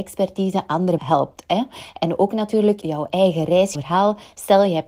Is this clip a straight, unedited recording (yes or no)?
no